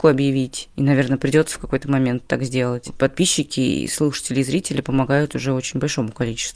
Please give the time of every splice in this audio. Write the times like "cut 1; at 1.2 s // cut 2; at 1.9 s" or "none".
none